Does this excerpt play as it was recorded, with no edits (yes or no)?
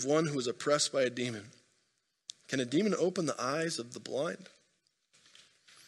yes